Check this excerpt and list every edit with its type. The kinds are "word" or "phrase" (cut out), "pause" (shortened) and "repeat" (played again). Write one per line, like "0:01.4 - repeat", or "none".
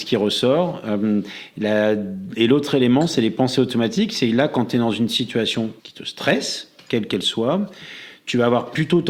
0:05.8 - pause

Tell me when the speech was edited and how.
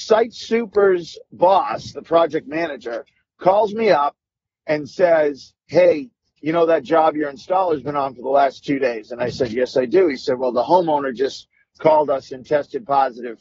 none

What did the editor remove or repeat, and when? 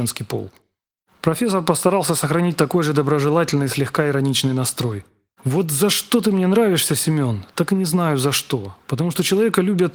none

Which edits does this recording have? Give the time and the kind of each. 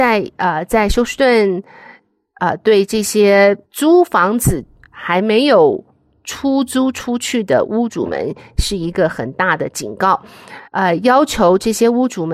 0:03.7 - pause
0:10.7 - pause

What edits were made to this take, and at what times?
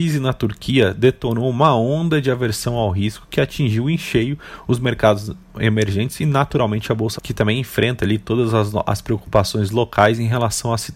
0:07.2 - word

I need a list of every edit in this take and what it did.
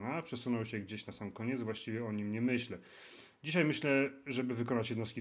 none

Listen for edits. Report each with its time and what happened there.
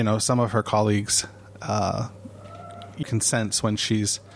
0:03.0 - word

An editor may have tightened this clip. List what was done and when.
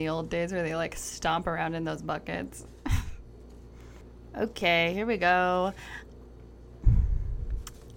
none

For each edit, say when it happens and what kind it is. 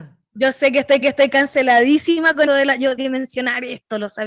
0:01.0 - repeat
0:02.5 - word
0:03.0 - phrase

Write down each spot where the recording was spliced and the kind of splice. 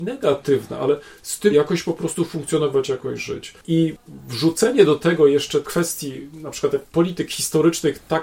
0:01.5 - word
0:05.6 - word

